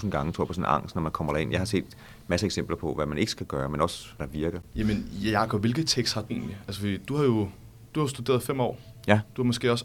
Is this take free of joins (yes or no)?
no